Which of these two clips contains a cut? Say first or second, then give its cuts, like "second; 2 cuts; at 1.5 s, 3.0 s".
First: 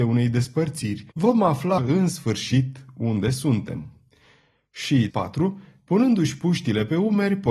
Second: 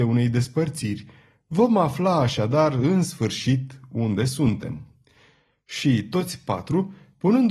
first; 3 cuts; at 1.1 s, 1.8 s, 5.1 s